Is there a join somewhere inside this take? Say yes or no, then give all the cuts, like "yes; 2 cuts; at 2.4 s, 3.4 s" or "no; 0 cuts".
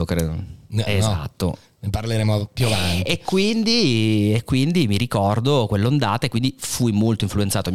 no; 0 cuts